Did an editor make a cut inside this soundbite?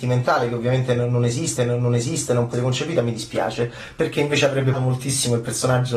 yes; 3 cuts; at 1.6 s, 2.5 s, 4.7 s

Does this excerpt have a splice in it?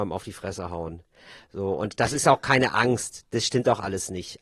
no; 0 cuts

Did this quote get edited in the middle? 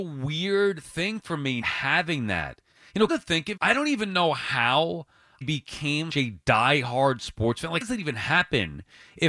yes; 6 cuts; at 1.6 s, 3.1 s, 3.6 s, 5.4 s, 6.1 s, 7.8 s

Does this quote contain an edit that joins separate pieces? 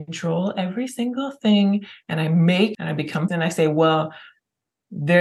yes; 2 cuts; at 2.7 s, 3.3 s

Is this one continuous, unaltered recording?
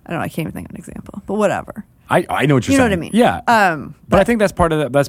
yes; 0 cuts

